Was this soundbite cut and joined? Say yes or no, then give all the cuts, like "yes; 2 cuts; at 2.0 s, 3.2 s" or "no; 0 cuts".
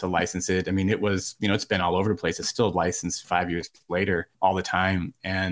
yes; 2 cuts; at 3.2 s, 4.3 s